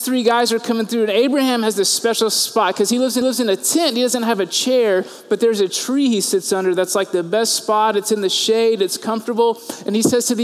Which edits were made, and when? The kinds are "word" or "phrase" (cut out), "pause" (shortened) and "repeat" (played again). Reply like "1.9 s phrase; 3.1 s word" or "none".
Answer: 3.2 s repeat